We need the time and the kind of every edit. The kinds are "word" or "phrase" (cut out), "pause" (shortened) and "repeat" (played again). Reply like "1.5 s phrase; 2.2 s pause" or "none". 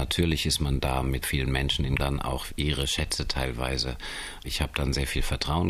1.2 s word; 2.0 s phrase; 2.5 s word